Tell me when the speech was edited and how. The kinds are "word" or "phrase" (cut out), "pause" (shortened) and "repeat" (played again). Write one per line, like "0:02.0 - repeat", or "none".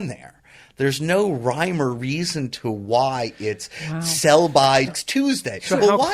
0:04.9 - word